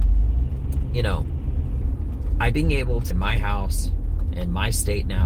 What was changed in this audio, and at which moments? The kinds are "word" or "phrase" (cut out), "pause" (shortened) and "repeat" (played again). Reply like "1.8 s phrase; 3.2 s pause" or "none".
2.5 s word; 3.1 s phrase